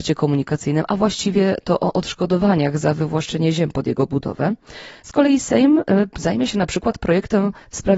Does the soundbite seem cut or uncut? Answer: uncut